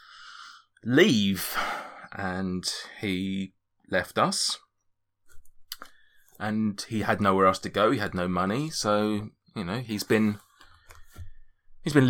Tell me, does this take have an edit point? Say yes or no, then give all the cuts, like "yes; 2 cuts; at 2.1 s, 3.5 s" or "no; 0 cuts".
no; 0 cuts